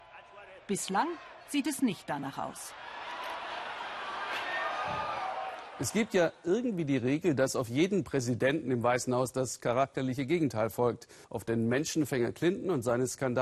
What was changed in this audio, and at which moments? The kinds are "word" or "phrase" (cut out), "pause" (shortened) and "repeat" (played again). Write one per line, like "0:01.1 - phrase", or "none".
0:11.2 - pause